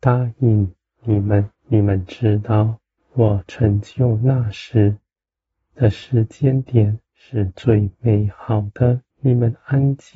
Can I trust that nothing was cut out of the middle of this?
no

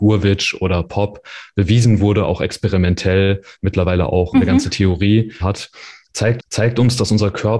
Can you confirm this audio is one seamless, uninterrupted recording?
no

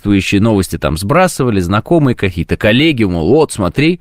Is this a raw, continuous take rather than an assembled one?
yes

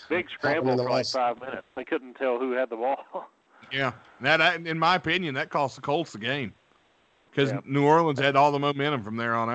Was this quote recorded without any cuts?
yes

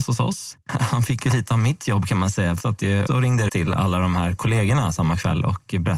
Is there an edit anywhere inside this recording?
yes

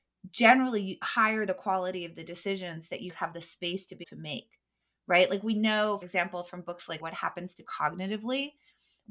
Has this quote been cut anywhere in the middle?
yes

